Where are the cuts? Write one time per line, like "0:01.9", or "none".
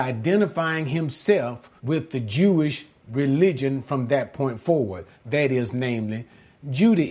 0:01.8